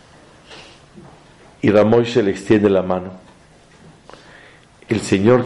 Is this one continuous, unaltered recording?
yes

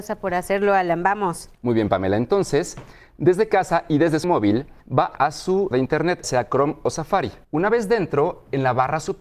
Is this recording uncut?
no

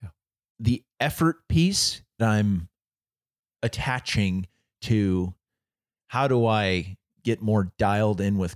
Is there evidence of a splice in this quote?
yes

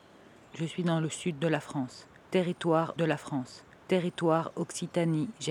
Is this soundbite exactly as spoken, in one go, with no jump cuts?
no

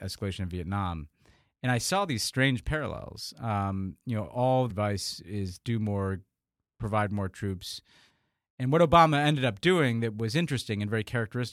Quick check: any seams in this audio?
yes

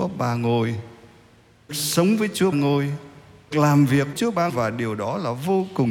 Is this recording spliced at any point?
yes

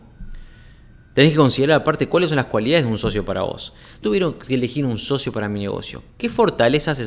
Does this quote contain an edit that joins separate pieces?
yes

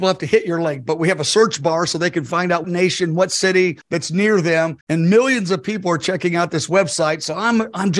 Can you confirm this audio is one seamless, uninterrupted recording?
no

